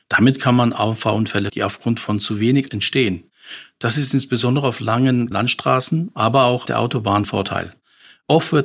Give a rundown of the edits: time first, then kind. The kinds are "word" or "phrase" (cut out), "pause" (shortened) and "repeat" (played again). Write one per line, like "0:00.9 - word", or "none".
0:01.5 - word
0:02.7 - word
0:05.3 - word
0:06.7 - word
0:07.2 - word